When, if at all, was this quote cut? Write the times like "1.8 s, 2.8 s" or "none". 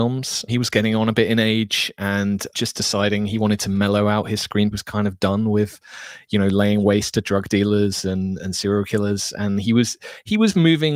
4.7 s, 8.4 s

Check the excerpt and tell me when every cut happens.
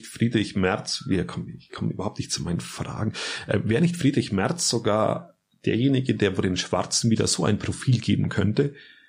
none

